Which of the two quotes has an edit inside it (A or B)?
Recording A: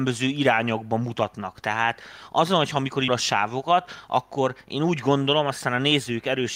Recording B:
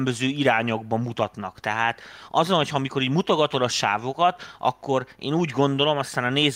A